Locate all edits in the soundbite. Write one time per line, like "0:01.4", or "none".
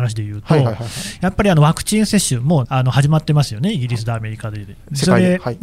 0:02.6

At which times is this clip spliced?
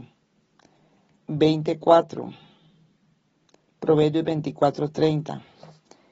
0:01.3

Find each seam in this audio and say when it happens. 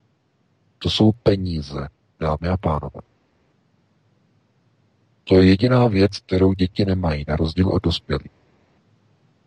0:01.9

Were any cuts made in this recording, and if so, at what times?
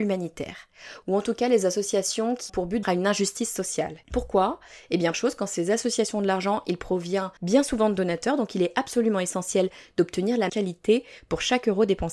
0:02.5
0:02.8
0:04.0
0:05.1
0:07.4
0:10.5

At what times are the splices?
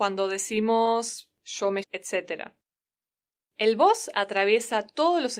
0:01.8

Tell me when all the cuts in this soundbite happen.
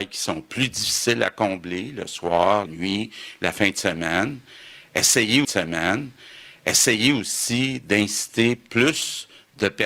0:02.7
0:05.4

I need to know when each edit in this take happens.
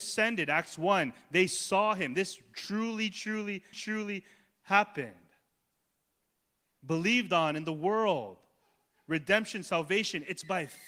0:03.7

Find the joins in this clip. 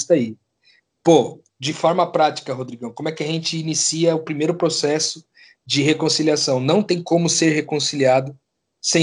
none

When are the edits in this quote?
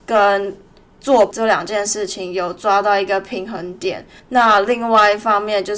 0:01.3
0:04.2

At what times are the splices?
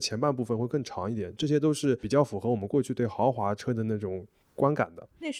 none

